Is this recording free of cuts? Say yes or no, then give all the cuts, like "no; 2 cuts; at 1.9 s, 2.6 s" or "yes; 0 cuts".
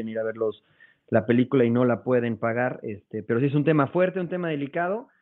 no; 1 cut; at 3.2 s